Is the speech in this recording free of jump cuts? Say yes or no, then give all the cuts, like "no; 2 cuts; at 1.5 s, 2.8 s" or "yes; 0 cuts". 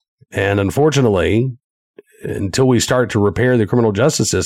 yes; 0 cuts